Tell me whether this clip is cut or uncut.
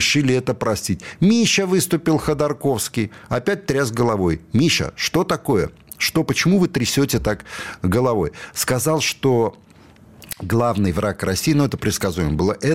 uncut